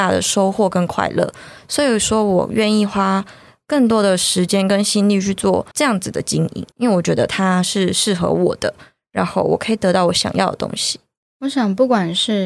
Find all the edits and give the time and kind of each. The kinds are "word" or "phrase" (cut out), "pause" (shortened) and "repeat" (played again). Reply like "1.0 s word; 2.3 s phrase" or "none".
5.7 s pause; 6.7 s pause